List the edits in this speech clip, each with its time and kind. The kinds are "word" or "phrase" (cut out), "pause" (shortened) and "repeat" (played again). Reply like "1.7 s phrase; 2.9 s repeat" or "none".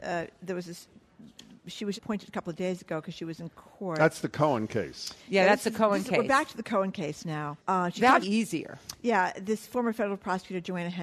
2.0 s word; 7.6 s pause; 8.2 s phrase